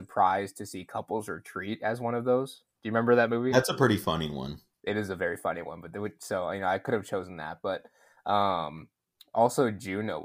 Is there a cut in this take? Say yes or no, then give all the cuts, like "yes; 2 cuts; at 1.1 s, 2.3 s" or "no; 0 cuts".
no; 0 cuts